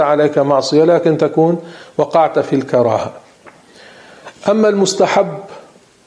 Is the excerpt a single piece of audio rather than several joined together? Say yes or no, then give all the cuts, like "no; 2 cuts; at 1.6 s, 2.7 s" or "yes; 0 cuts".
yes; 0 cuts